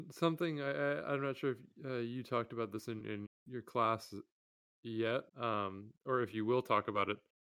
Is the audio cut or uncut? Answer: cut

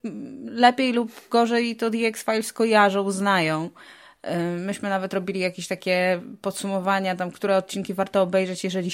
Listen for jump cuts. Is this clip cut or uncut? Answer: uncut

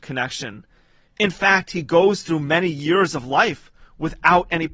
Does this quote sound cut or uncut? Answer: uncut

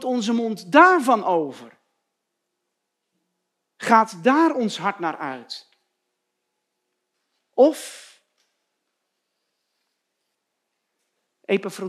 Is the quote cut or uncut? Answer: uncut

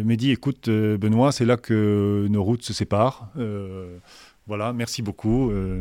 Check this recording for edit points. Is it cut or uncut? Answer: uncut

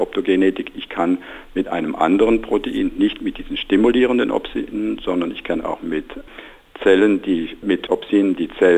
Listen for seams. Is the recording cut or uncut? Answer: uncut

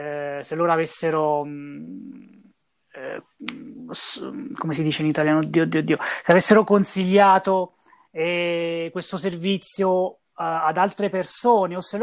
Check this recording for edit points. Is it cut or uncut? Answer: uncut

